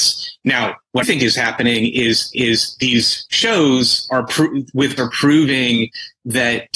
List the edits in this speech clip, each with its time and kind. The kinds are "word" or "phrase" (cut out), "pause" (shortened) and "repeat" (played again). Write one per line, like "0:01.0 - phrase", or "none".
0:01.0 - phrase
0:02.3 - repeat
0:05.0 - phrase